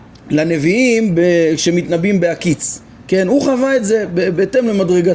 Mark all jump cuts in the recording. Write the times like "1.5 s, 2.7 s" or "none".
none

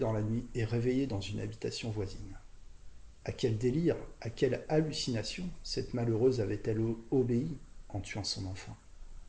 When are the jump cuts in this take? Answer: none

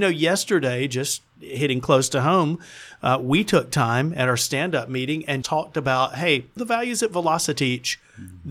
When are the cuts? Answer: 5.4 s, 6.6 s

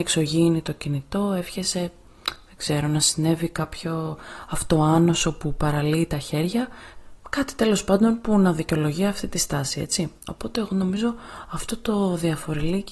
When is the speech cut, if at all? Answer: none

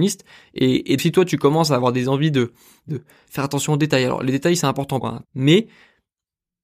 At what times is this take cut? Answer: 1.0 s, 2.9 s, 5.0 s

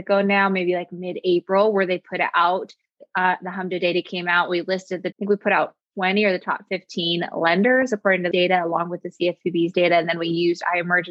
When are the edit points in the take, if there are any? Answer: 5.1 s, 8.3 s

